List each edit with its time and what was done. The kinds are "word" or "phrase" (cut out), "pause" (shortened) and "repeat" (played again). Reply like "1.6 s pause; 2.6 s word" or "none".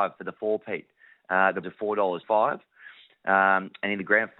1.6 s word; 2.2 s word